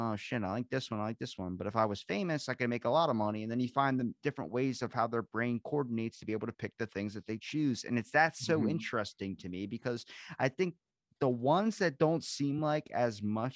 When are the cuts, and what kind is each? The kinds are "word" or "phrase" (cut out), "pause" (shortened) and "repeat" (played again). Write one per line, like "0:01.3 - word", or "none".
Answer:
none